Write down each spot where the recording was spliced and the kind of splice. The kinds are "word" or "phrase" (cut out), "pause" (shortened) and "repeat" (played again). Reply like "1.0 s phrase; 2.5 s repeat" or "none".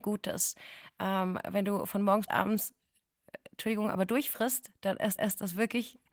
2.3 s word; 5.2 s repeat